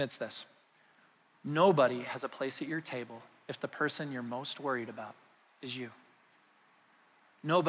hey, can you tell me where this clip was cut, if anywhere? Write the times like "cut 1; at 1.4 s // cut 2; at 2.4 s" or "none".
none